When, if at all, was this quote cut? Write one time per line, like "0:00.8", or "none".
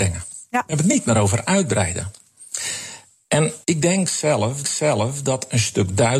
0:03.6
0:04.6